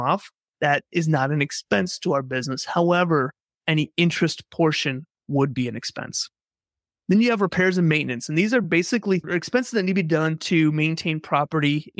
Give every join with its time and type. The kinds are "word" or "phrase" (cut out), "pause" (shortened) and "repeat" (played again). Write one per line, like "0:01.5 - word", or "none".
none